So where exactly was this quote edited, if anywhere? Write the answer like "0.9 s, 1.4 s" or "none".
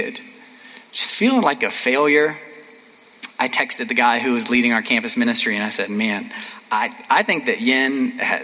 none